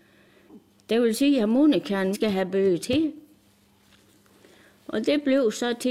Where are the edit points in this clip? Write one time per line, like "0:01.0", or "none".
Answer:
0:02.1